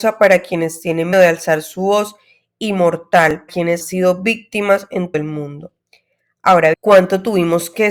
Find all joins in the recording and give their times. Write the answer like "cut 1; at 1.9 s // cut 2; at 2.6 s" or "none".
cut 1; at 1.1 s // cut 2; at 3.5 s // cut 3; at 3.8 s // cut 4; at 5.1 s // cut 5; at 6.7 s